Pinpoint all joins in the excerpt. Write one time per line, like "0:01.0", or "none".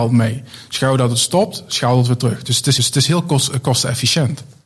0:02.8